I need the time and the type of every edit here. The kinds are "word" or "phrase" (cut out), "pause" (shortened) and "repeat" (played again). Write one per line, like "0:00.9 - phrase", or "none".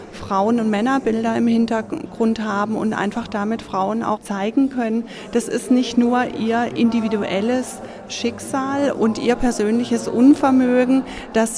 0:04.2 - word